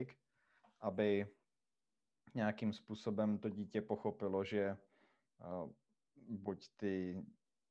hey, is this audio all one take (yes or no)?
yes